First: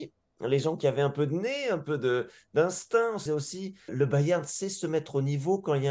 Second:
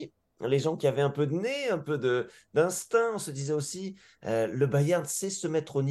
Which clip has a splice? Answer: first; 2 cuts; at 3.3 s, 3.9 s

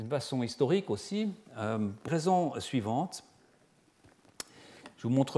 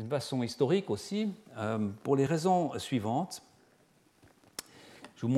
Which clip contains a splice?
first; 1 cut; at 2.1 s

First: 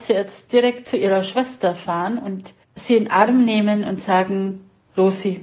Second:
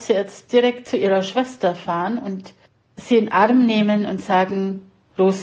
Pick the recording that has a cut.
first; 1 cut; at 2.6 s

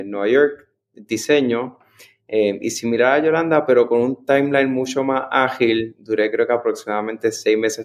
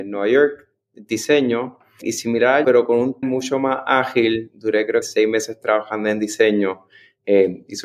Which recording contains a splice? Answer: second; 4 cuts; at 2.0 s, 2.6 s, 3.2 s, 5.0 s

